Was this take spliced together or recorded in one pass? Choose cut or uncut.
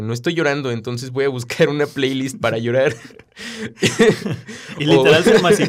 uncut